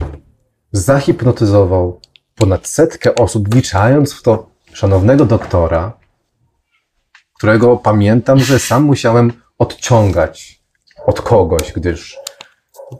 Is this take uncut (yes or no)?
yes